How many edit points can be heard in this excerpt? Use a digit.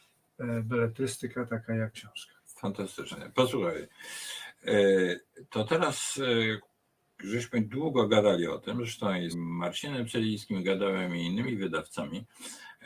4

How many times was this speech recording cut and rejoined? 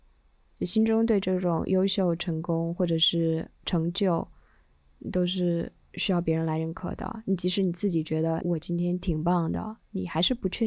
2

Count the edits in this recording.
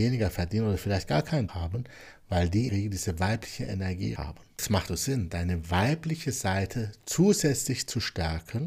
5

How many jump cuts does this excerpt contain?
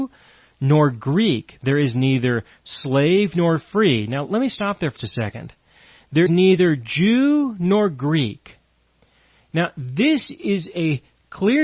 2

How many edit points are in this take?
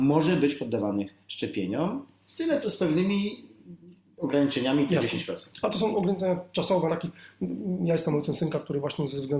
2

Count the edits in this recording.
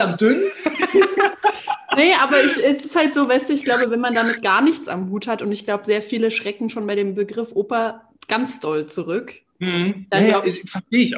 1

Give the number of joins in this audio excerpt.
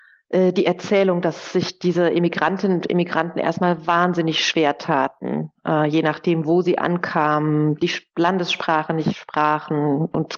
0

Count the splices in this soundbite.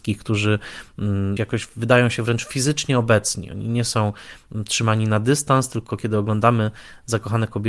1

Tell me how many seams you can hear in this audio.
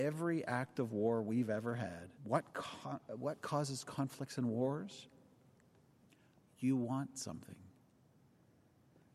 1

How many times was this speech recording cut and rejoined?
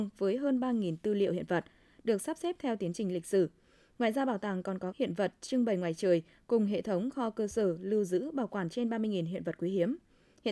1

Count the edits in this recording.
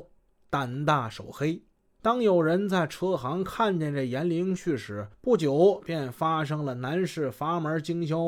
1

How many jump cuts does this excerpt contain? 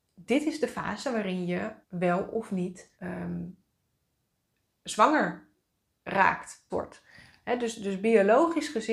3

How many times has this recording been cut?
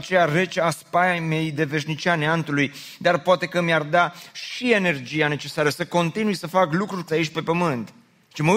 1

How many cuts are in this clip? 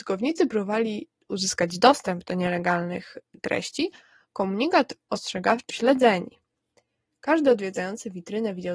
1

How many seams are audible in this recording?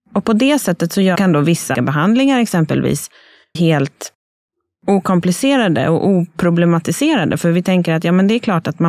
3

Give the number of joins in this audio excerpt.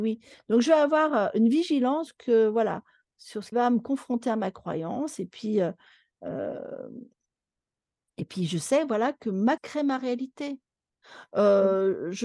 3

